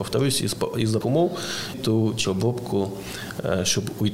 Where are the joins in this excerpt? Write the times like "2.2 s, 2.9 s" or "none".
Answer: 1.0 s, 1.7 s, 2.2 s